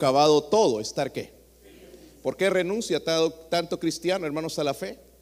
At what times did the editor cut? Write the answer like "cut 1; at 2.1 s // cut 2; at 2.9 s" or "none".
none